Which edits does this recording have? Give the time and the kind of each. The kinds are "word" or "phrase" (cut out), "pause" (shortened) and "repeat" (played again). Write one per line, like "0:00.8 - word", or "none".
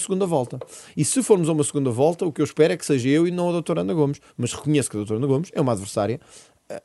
none

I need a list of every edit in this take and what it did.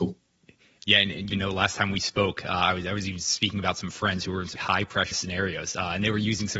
0:01.3 - word
0:04.6 - word
0:05.1 - word

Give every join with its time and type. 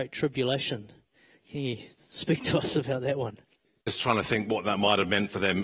0:03.6 - pause

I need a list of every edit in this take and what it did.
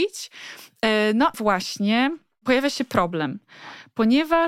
0:01.3 - word

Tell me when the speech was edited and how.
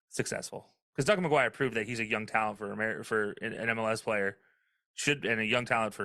none

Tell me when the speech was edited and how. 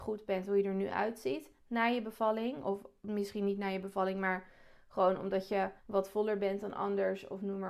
0:05.8 - pause

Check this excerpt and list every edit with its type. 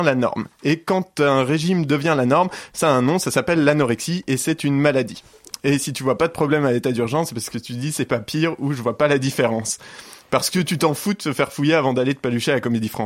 none

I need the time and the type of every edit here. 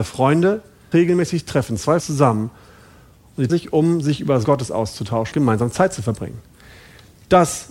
0:00.9 - word
0:02.0 - word
0:03.5 - word
0:04.4 - word
0:05.3 - word

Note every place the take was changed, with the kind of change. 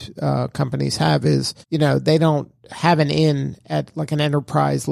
0:01.6 - pause

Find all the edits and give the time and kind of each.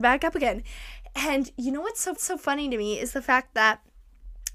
0:02.2 - repeat

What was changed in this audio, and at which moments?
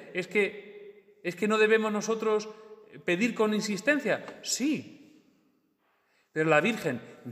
none

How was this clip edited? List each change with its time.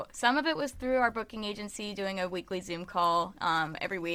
none

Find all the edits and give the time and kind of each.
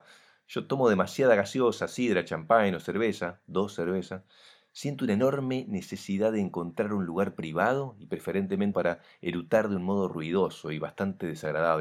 0:08.7 - word

